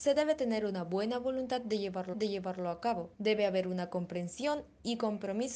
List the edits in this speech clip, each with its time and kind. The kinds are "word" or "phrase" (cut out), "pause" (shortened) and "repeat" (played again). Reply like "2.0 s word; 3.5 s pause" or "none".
2.1 s repeat; 3.1 s pause